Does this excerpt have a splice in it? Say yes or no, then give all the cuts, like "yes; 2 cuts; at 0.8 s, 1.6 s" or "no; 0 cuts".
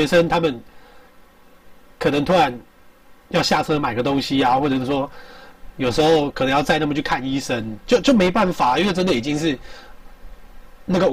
no; 0 cuts